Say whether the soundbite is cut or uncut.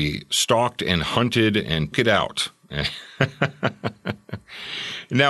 cut